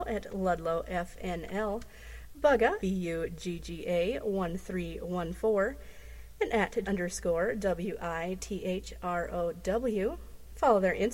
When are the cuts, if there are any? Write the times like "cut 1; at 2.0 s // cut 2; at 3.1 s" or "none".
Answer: cut 1; at 2.8 s // cut 2; at 6.9 s